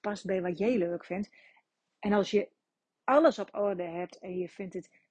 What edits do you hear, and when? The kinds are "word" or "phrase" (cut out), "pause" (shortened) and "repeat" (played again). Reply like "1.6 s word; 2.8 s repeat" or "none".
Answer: none